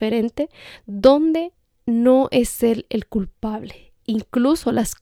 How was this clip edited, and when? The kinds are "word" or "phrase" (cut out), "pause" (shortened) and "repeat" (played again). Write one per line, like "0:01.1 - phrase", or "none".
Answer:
none